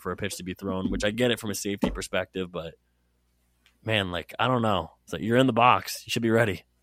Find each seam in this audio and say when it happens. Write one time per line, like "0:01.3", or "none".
none